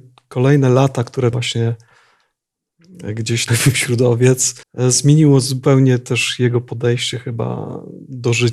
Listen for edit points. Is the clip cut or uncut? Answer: cut